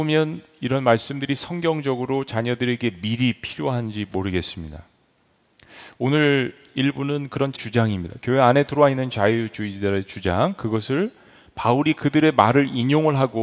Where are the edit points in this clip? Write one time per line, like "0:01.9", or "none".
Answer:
0:07.5